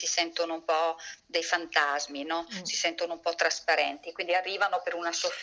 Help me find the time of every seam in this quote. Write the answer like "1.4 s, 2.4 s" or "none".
none